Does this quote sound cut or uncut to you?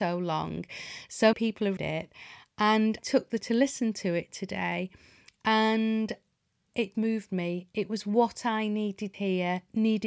cut